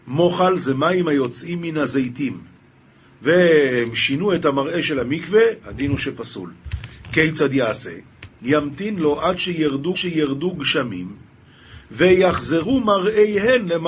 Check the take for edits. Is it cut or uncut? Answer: cut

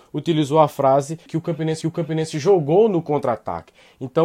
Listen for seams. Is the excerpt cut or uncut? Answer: cut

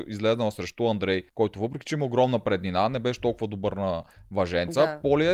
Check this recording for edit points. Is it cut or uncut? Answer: cut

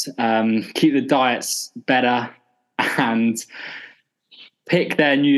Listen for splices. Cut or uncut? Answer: uncut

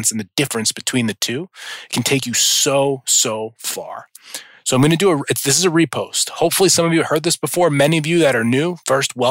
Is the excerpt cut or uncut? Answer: uncut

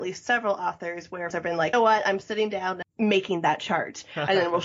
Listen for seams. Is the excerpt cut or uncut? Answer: cut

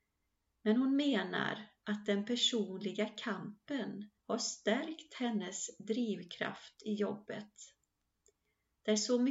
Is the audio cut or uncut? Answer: cut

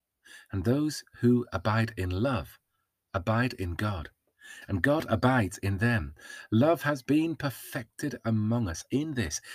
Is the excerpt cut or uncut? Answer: uncut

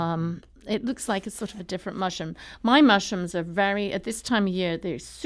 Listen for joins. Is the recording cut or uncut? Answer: uncut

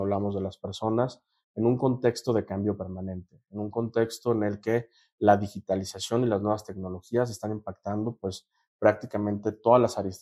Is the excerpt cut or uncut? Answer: uncut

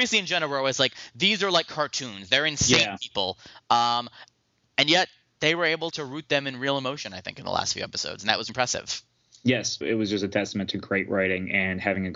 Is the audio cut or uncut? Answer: cut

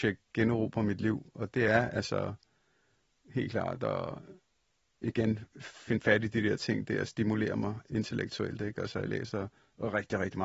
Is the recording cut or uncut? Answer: uncut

